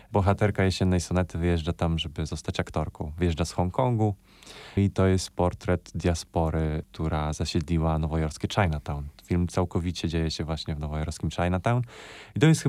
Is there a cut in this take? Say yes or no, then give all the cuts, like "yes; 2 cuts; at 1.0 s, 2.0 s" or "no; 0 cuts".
yes; 1 cut; at 4.8 s